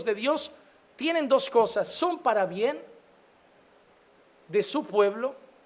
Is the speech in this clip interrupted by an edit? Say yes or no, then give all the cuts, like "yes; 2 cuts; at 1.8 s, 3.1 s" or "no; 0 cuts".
no; 0 cuts